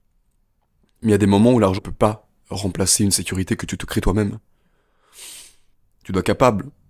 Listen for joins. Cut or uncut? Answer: cut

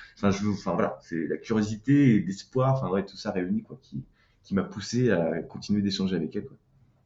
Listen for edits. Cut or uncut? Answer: uncut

